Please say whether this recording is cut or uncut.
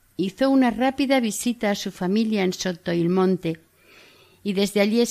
uncut